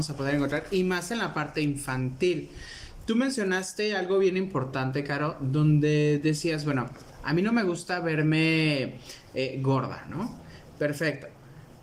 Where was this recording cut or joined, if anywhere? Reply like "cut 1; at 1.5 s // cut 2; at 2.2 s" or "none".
none

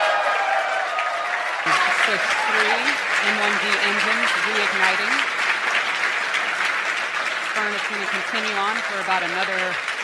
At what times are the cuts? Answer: none

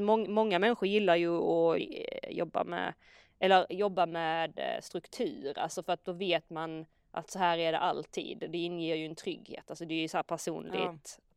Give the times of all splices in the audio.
cut 1; at 1.8 s

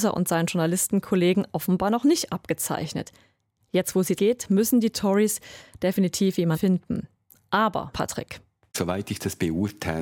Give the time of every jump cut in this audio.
cut 1; at 1.5 s // cut 2; at 4.2 s // cut 3; at 6.5 s // cut 4; at 7.9 s

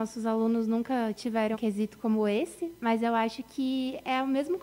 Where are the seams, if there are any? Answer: cut 1; at 1.5 s

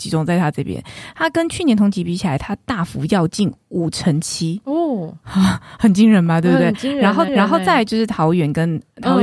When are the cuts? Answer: cut 1; at 7.3 s

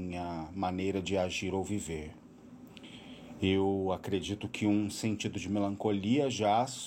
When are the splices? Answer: none

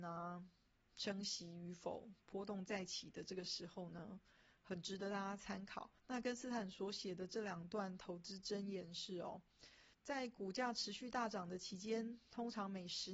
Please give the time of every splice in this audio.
cut 1; at 6.0 s // cut 2; at 9.9 s

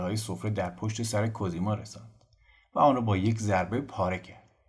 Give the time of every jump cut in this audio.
none

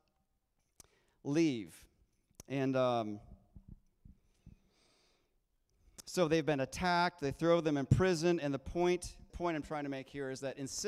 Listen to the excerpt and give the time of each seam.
cut 1; at 9.3 s

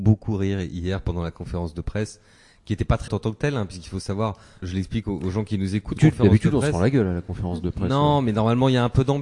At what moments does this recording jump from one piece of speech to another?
cut 1; at 3.1 s // cut 2; at 4.6 s // cut 3; at 6.0 s

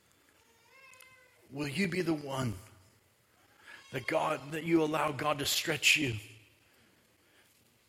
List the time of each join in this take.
none

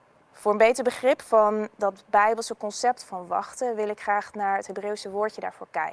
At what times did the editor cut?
none

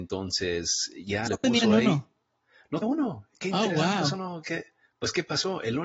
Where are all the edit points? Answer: cut 1; at 1.3 s // cut 2; at 2.8 s // cut 3; at 3.3 s

